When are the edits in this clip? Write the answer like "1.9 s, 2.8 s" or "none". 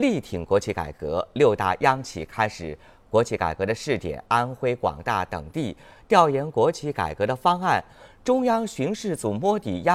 none